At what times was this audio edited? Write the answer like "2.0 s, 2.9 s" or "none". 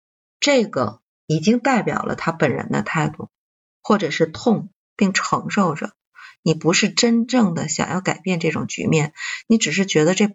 1.1 s